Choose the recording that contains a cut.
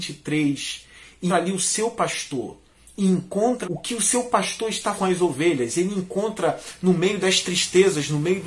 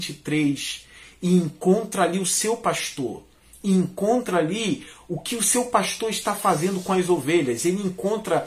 first; 3 cuts; at 1.3 s, 3.6 s, 5.0 s

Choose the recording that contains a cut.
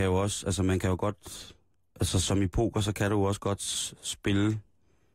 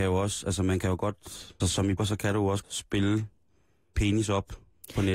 second; 4 cuts; at 1.6 s, 2.0 s, 2.6 s, 4.0 s

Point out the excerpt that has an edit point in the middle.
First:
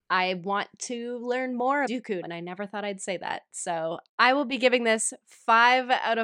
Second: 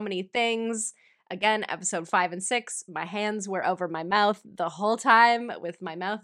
first; 3 cuts; at 1.9 s, 2.2 s, 4.1 s

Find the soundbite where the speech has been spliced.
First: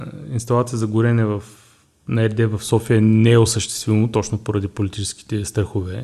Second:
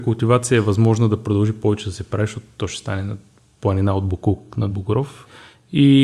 second; 1 cut; at 4.7 s

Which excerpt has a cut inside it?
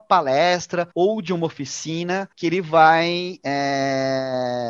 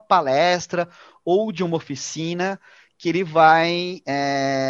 first; 2 cuts; at 0.9 s, 2.3 s

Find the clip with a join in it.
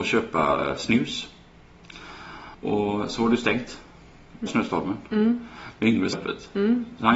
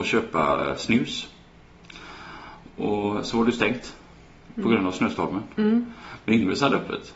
first; 3 cuts; at 2.5 s, 4.5 s, 6.1 s

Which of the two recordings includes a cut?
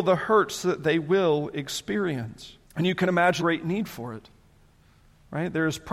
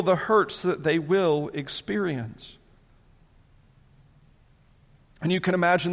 first; 2 cuts; at 2.6 s, 3.4 s

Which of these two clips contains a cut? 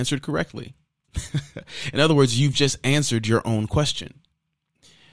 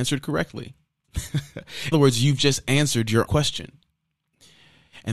second; 2 cuts; at 1.9 s, 3.3 s

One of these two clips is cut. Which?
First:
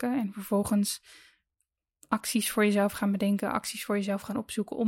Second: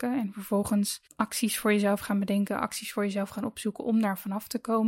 second; 1 cut; at 1.1 s

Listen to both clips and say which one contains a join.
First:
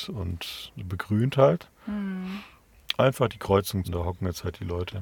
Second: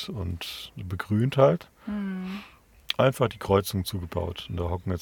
first; 1 cut; at 3.8 s

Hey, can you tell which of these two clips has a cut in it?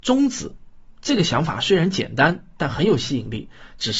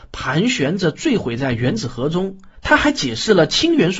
second; 1 cut; at 2.5 s

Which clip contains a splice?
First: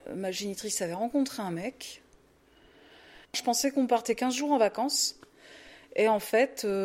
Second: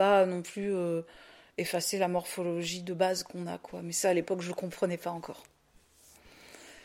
first; 1 cut; at 3.2 s

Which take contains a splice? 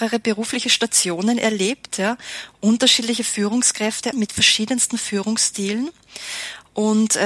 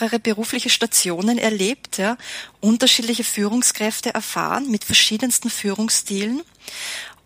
first; 1 cut; at 4.1 s

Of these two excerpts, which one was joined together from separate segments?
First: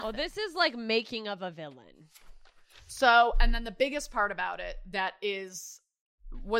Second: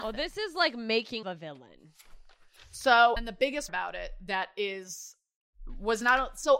second; 3 cuts; at 1.2 s, 3.2 s, 3.7 s

